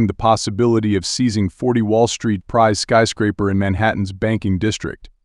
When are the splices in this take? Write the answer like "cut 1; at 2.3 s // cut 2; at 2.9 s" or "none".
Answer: cut 1; at 2.4 s